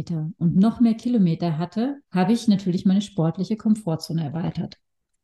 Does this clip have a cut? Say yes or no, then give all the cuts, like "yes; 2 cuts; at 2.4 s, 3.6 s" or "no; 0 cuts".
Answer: yes; 1 cut; at 2.0 s